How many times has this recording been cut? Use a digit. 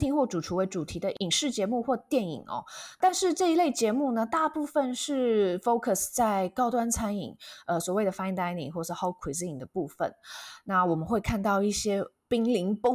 0